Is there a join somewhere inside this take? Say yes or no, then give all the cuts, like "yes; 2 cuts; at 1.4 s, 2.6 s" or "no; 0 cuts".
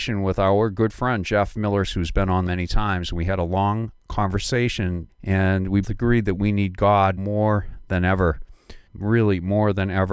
yes; 6 cuts; at 1.9 s, 2.5 s, 5.1 s, 5.8 s, 7.2 s, 8.9 s